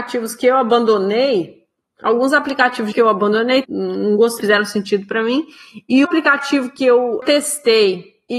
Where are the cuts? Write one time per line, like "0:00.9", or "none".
0:02.9
0:03.6
0:04.4
0:06.0